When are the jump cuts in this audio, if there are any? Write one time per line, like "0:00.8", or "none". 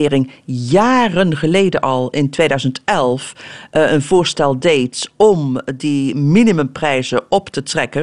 none